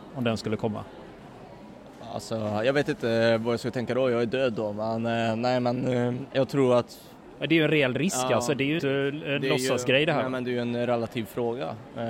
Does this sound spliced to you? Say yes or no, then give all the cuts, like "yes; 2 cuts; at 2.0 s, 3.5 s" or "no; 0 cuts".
yes; 2 cuts; at 6.3 s, 8.8 s